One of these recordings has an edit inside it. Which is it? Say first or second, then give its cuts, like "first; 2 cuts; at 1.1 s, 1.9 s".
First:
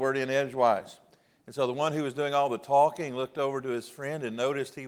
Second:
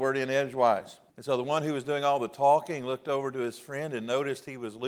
second; 1 cut; at 1.1 s